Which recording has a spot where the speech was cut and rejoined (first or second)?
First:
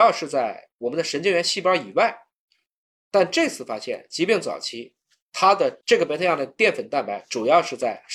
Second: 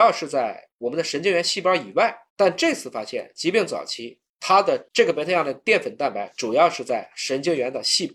second